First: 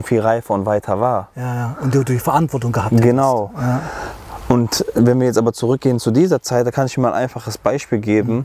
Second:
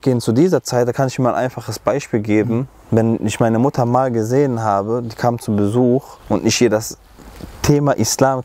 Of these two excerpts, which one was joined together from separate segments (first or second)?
second